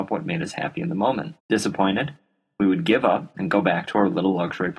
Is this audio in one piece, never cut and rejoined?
no; 1 cut; at 1.4 s

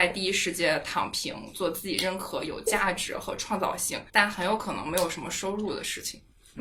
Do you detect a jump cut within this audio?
yes; 1 cut; at 4.1 s

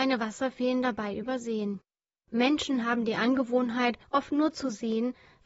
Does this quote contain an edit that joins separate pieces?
no; 0 cuts

